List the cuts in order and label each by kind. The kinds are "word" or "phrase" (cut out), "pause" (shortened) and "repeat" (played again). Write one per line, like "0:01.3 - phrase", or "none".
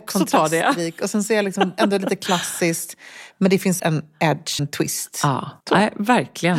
0:03.8 - word
0:04.6 - word
0:05.6 - pause